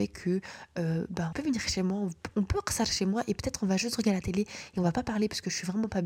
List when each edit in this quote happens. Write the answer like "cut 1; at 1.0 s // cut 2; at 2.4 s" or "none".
cut 1; at 1.3 s